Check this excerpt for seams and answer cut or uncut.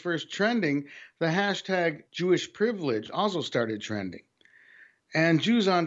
cut